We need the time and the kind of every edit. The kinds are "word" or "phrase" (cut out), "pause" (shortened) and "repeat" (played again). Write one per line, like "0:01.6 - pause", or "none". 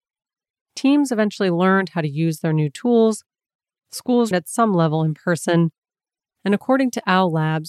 0:04.3 - word